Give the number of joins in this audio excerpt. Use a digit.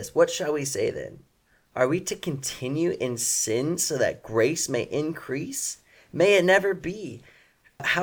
0